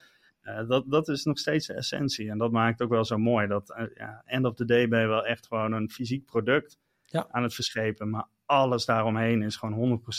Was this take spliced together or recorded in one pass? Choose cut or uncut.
uncut